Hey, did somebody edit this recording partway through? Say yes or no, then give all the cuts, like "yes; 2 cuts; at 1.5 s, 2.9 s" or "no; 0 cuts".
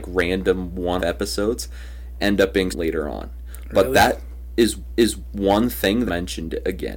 yes; 4 cuts; at 1.0 s, 2.7 s, 4.9 s, 6.1 s